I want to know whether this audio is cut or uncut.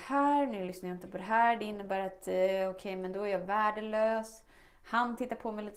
uncut